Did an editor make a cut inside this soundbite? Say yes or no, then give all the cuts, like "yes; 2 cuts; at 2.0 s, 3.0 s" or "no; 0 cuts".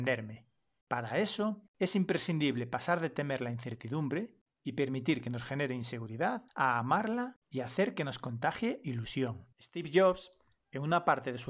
yes; 3 cuts; at 1.7 s, 6.5 s, 9.5 s